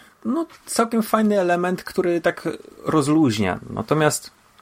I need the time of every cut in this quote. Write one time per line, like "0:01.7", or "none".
none